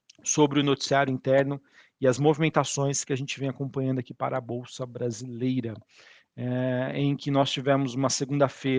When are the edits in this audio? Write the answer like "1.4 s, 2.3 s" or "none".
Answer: none